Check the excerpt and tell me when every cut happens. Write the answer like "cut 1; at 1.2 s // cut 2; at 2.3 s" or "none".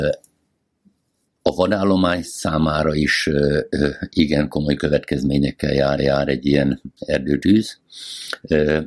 cut 1; at 6.0 s